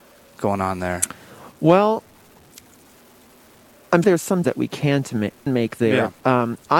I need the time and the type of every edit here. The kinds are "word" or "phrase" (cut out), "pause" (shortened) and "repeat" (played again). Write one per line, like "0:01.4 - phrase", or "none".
0:04.0 - word
0:04.4 - word
0:05.5 - word